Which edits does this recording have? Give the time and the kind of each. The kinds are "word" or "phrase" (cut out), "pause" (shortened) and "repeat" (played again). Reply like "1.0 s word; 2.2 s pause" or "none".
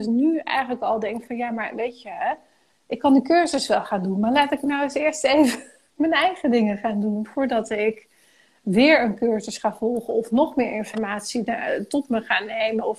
none